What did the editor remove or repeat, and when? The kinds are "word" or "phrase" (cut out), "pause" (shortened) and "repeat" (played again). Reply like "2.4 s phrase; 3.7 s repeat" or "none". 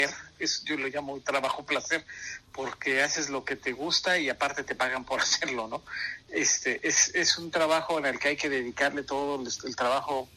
none